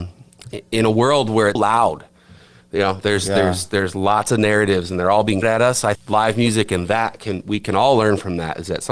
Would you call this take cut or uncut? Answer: cut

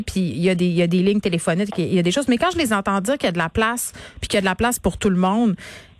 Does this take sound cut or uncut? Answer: uncut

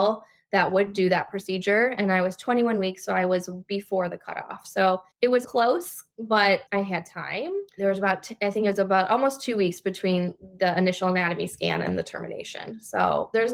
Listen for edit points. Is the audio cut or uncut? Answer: cut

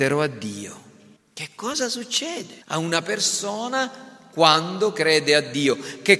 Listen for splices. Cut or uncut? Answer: cut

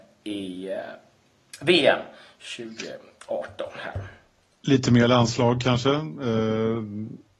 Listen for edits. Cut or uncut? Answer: uncut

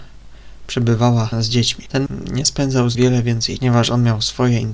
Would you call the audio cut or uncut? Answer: cut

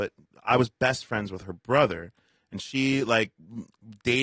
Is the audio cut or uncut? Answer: uncut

